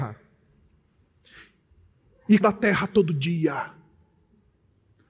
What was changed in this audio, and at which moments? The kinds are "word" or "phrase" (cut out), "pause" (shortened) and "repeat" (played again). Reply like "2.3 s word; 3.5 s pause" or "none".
2.4 s phrase